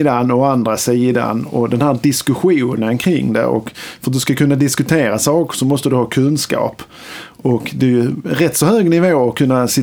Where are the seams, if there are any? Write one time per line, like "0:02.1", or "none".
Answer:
none